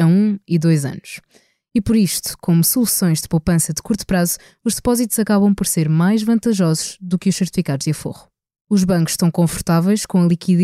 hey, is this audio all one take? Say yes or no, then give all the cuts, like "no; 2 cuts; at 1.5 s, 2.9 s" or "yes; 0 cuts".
yes; 0 cuts